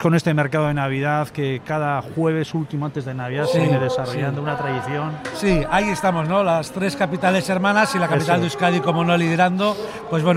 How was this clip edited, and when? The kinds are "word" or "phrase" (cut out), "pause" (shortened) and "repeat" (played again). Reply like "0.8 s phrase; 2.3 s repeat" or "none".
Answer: none